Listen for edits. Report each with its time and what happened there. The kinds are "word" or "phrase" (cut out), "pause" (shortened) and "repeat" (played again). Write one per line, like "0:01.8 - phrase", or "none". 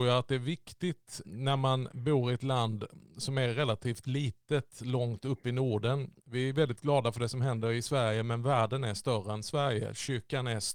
0:01.2 - word